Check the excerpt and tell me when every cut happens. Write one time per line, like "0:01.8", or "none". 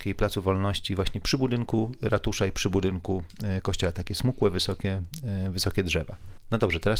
none

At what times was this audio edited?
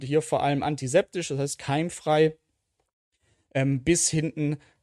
none

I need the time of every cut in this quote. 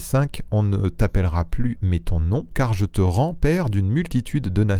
0:01.8
0:02.5

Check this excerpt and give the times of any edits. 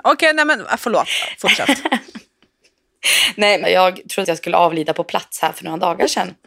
0:03.6
0:04.2

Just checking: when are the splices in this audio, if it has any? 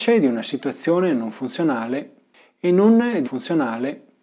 0:03.2

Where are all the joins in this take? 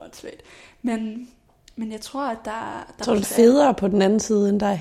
0:01.6
0:03.2

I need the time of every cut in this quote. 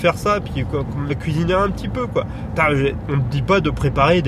0:01.1
0:03.0

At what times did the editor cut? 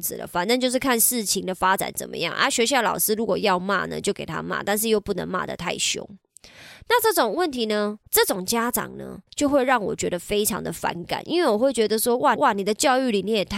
0:08.1
0:09.3
0:12.4

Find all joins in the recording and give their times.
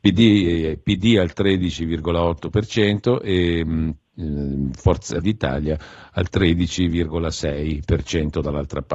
0:05.2

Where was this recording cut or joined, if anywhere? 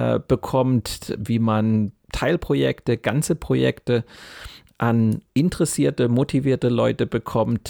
0:02.0
0:05.3

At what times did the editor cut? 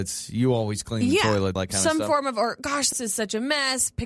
0:01.6
0:02.9

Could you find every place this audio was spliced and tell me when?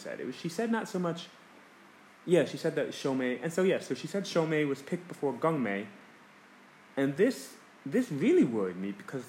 none

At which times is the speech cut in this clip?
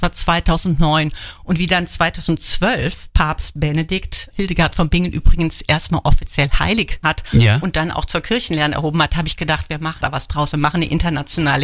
0:04.3
0:07.0
0:10.0

